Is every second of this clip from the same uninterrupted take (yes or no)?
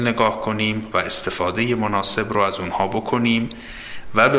yes